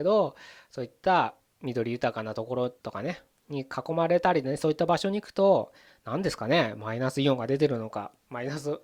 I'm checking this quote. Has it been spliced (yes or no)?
yes